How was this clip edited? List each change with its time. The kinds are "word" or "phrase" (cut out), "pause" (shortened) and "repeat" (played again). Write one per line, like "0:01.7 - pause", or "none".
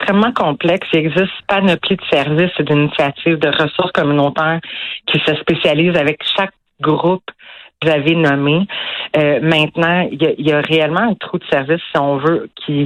0:01.4 - word
0:07.8 - word